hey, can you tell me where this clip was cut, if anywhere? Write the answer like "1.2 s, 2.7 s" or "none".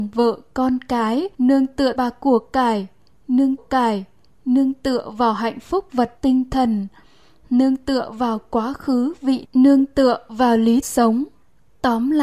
1.3 s, 2.0 s, 3.6 s, 6.2 s, 9.4 s, 10.8 s